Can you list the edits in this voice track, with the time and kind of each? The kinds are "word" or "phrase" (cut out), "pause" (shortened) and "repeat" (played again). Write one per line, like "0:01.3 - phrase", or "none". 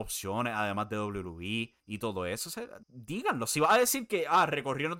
0:01.8 - pause
0:02.8 - pause

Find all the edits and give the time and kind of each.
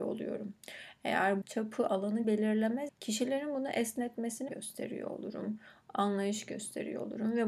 0:01.4 - word
0:02.2 - word
0:02.9 - word
0:04.5 - word

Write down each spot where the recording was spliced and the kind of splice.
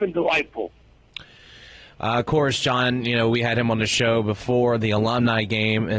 none

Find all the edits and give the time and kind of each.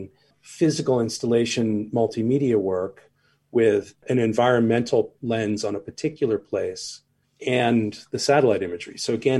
none

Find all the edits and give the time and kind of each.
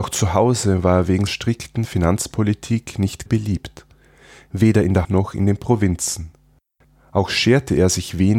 0:01.3 - word
0:03.3 - word
0:05.0 - word

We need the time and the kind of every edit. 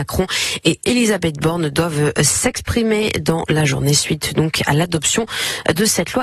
none

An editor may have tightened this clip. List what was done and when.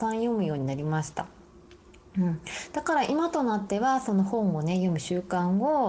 0:02.1 - pause

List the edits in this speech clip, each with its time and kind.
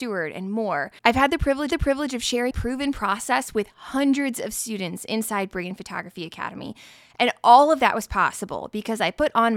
0:01.0 - pause
0:01.7 - repeat
0:02.5 - word

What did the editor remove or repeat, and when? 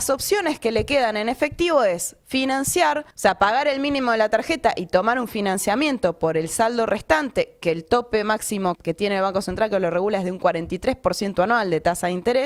0:03.1 - pause
0:08.8 - word

